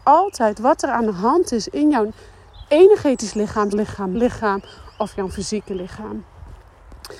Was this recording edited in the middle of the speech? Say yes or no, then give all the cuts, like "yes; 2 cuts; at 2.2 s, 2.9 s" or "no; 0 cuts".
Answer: yes; 2 cuts; at 3.7 s, 4.1 s